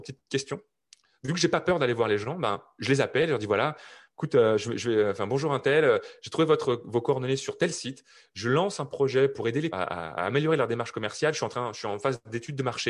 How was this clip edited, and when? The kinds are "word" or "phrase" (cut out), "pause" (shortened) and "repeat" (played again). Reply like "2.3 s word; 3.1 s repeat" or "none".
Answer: 9.7 s phrase